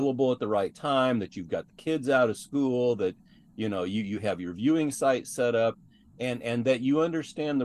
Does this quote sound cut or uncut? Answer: uncut